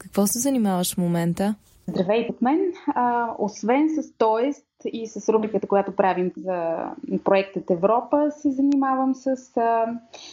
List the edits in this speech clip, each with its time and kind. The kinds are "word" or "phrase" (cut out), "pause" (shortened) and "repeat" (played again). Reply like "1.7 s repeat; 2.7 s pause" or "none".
2.3 s word; 6.4 s word